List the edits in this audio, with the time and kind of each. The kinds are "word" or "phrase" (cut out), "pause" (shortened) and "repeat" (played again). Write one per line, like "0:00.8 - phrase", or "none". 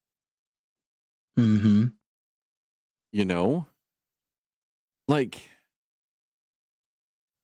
none